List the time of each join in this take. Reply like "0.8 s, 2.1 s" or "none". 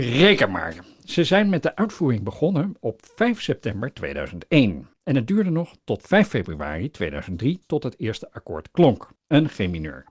4.9 s, 9.2 s